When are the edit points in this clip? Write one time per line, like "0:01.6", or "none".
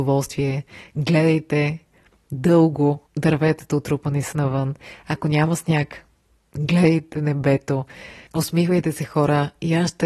0:03.1
0:04.3